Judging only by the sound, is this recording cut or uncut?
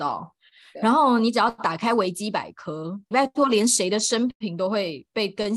cut